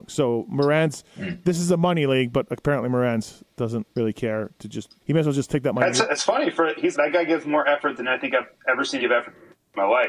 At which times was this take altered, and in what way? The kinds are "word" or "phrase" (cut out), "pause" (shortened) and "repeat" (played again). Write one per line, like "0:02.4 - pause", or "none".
0:03.9 - pause
0:05.0 - pause
0:06.9 - word
0:09.0 - word